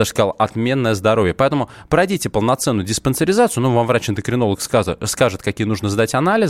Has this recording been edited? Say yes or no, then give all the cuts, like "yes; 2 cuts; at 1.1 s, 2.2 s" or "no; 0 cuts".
no; 0 cuts